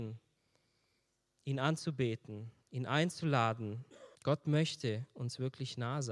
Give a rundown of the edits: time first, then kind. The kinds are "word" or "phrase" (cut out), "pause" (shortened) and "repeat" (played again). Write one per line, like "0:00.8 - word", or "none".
0:04.2 - pause